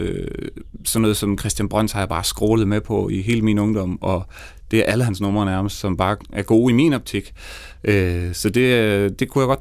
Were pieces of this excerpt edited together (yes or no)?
no